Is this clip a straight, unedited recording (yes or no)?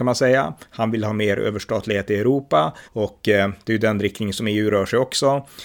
no